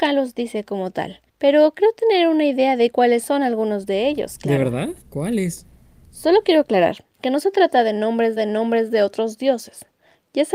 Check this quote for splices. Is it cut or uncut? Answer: cut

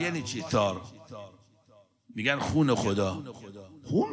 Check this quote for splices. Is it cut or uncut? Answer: uncut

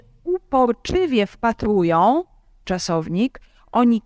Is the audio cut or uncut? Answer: cut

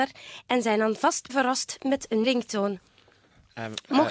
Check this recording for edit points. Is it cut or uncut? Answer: cut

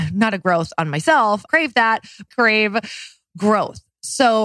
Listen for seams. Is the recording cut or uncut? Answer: cut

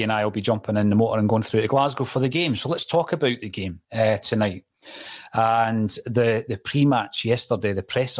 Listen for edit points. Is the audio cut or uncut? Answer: cut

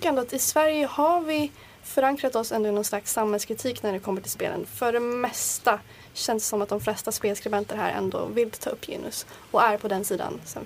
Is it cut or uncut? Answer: uncut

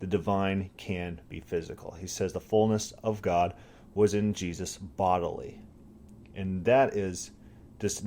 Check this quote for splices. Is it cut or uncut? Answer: uncut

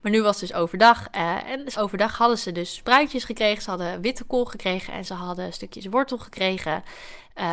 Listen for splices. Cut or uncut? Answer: cut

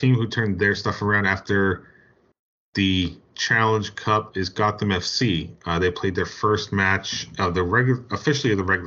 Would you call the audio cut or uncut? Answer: uncut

